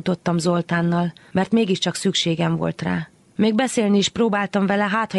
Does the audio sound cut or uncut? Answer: uncut